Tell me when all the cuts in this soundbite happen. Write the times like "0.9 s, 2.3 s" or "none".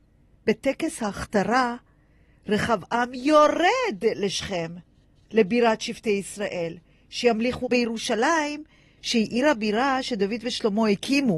7.6 s